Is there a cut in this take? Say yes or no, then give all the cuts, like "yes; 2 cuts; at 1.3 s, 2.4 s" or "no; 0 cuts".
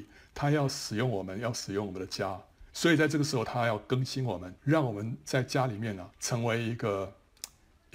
yes; 3 cuts; at 2.7 s, 4.6 s, 6.1 s